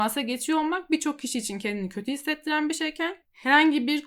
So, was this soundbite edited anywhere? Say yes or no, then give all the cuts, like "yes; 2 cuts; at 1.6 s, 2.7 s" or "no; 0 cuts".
no; 0 cuts